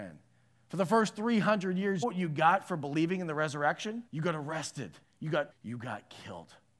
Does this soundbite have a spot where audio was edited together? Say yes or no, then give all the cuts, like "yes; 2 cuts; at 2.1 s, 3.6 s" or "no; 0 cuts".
yes; 4 cuts; at 2.0 s, 4.1 s, 5.0 s, 5.5 s